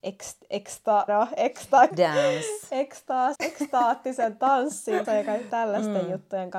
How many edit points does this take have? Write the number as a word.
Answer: five